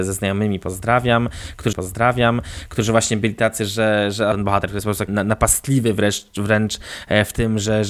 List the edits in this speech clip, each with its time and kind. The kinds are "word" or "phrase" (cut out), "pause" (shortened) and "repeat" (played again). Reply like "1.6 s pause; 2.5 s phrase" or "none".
1.7 s repeat; 4.3 s phrase; 5.1 s word